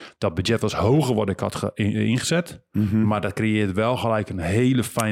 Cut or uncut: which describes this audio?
uncut